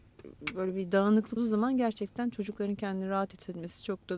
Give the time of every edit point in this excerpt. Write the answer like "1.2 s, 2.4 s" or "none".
1.4 s

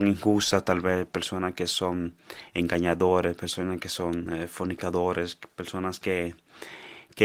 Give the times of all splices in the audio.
none

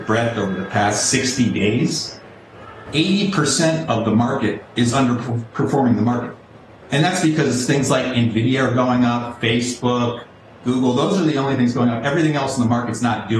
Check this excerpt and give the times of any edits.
none

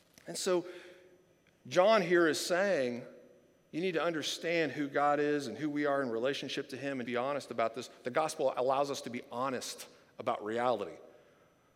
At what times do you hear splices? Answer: 7.0 s

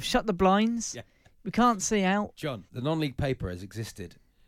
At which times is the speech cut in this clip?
none

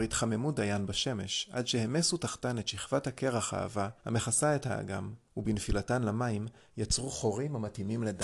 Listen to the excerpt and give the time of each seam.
4.0 s, 5.3 s

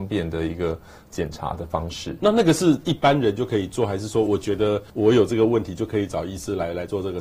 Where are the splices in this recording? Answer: 4.9 s

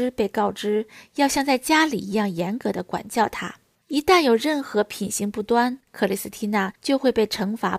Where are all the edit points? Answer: 3.7 s, 5.8 s, 6.8 s

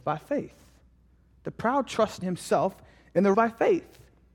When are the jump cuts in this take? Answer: 2.2 s, 3.3 s

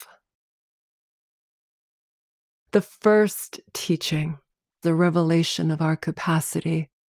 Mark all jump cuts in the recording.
4.8 s

